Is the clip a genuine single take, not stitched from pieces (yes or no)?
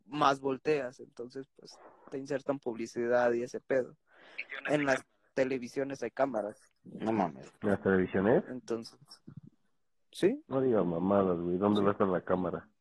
yes